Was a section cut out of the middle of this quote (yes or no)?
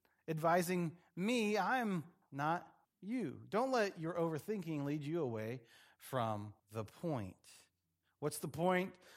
yes